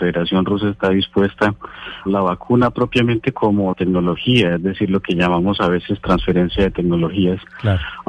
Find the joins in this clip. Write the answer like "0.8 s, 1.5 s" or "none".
2.1 s, 3.7 s